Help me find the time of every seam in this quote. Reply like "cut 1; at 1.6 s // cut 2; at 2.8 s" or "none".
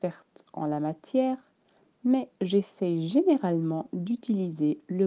none